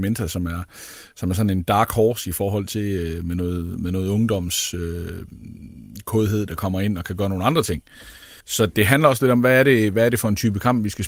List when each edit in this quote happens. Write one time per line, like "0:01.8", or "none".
0:08.4